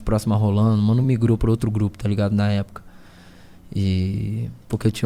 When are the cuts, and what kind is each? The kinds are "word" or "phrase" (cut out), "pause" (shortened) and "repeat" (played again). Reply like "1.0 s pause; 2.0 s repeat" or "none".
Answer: none